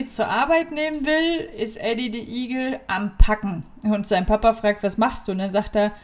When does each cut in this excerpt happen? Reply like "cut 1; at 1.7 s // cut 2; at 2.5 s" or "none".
none